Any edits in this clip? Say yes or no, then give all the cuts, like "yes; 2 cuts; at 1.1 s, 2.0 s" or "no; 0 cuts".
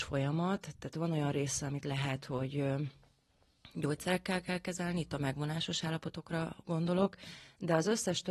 no; 0 cuts